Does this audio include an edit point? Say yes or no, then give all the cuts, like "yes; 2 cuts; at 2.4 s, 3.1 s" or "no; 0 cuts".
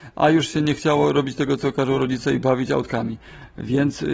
no; 0 cuts